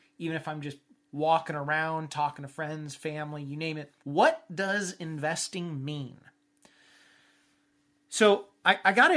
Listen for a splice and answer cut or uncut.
cut